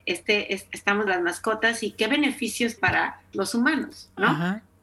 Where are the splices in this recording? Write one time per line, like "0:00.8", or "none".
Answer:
0:01.1
0:02.8
0:03.3